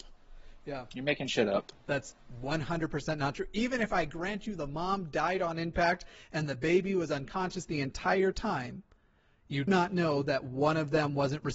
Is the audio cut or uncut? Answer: cut